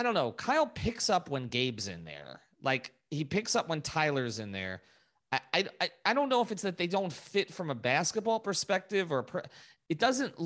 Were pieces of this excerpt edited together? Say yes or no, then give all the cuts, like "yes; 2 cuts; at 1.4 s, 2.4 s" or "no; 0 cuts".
no; 0 cuts